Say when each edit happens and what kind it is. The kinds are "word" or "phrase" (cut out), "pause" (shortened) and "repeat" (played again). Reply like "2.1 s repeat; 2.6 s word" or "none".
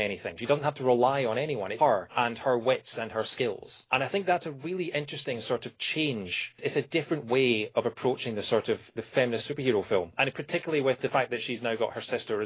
1.8 s word